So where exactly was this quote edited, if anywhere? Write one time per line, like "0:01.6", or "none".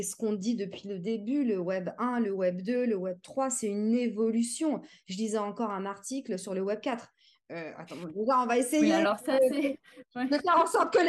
none